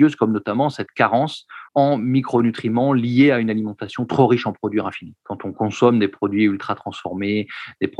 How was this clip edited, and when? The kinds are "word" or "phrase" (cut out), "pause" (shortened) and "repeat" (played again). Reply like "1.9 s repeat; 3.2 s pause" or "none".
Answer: 1.7 s pause